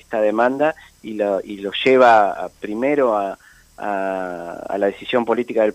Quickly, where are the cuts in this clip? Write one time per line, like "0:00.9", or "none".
none